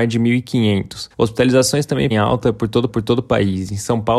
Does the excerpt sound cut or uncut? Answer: cut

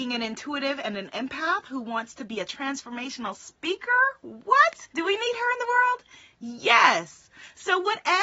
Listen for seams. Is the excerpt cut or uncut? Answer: cut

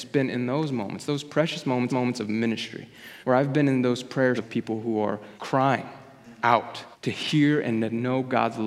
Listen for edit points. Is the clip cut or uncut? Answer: cut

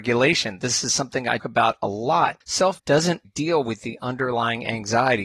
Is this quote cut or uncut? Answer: cut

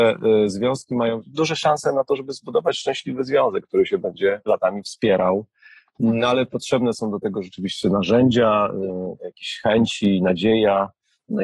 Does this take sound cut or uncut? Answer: uncut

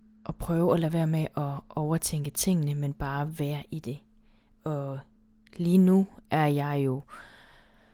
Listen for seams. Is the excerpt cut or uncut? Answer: uncut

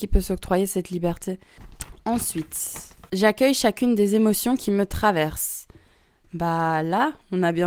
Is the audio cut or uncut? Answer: uncut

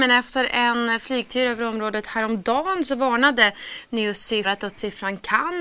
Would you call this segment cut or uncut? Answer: cut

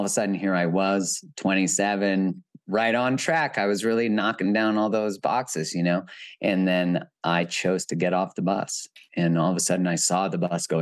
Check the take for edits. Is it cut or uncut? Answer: uncut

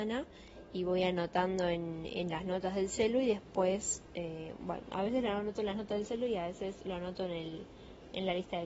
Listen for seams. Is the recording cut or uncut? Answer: uncut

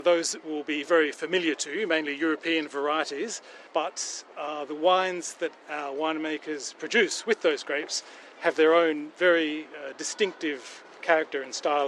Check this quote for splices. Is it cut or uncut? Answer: cut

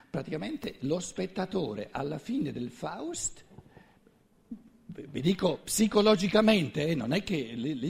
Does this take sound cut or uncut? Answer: uncut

